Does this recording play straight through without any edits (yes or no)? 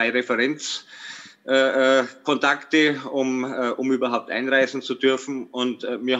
yes